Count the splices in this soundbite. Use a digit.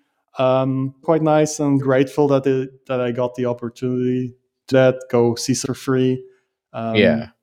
4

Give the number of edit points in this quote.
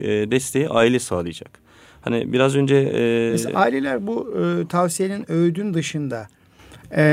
0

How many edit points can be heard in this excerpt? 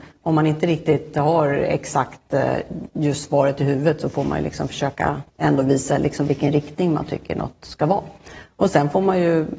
1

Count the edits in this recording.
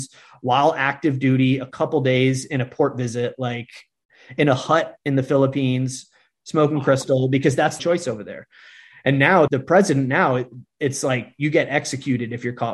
2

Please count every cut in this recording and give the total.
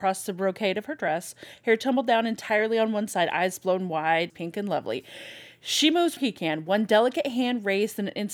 2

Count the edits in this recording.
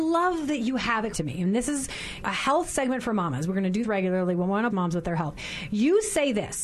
4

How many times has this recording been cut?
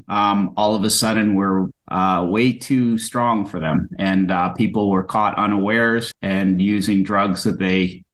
0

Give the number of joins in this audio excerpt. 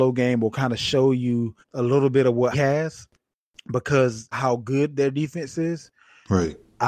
3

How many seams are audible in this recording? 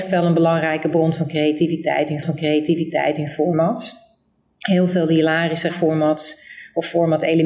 2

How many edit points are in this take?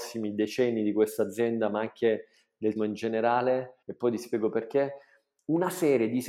2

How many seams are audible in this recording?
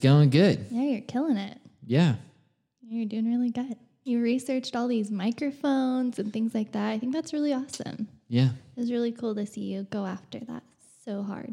0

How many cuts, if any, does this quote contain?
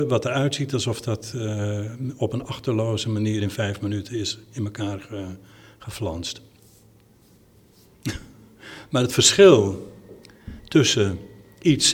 0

